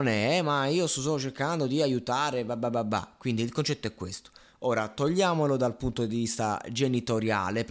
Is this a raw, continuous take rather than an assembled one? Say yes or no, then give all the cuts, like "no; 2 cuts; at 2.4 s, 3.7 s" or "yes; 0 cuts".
yes; 0 cuts